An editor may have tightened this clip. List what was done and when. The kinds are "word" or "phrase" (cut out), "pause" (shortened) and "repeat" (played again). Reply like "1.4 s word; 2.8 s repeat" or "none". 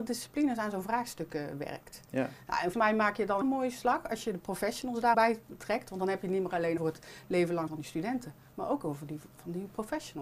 2.7 s word; 3.4 s word; 5.1 s word; 6.8 s word; 7.7 s word